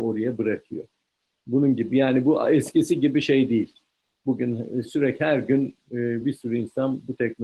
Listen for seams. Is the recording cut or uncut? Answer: uncut